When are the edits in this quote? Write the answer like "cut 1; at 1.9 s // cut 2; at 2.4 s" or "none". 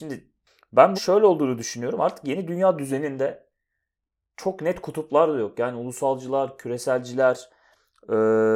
cut 1; at 0.9 s